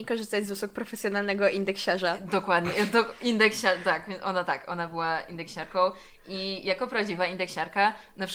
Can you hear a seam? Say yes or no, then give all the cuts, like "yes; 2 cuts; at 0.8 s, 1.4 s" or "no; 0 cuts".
no; 0 cuts